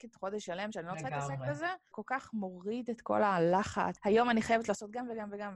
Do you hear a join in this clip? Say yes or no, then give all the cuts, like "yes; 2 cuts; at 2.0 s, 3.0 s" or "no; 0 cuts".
yes; 2 cuts; at 1.9 s, 4.0 s